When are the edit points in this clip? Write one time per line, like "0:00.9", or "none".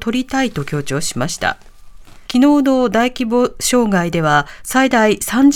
0:02.2